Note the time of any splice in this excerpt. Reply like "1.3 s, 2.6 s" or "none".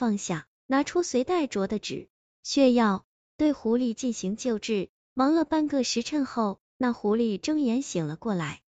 none